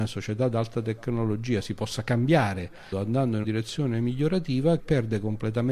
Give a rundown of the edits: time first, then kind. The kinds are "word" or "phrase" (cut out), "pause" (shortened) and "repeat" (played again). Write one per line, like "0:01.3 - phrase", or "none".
0:02.9 - phrase
0:03.4 - word
0:04.8 - word